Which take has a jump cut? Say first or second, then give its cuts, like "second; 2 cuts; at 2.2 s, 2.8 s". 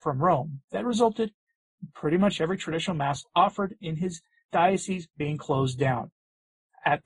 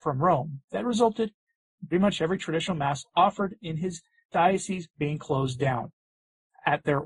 second; 1 cut; at 1.9 s